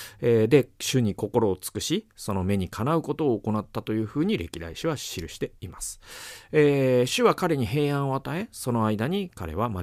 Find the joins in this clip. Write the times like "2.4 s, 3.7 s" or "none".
none

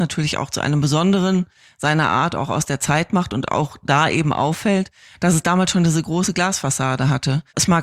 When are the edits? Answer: none

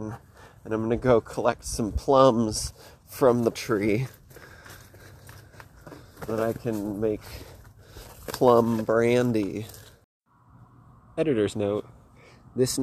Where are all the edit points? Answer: 3.5 s, 6.3 s

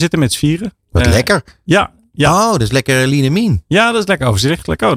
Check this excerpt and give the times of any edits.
none

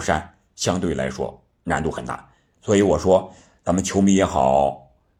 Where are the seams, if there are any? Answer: none

